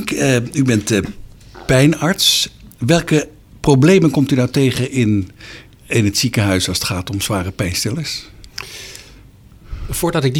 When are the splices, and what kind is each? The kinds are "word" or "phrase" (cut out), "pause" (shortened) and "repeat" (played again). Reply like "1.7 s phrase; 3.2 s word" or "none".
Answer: none